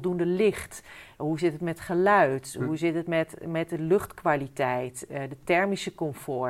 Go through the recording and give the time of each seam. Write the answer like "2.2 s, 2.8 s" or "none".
none